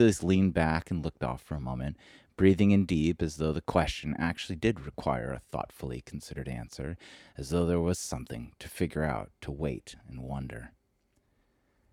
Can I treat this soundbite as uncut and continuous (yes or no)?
yes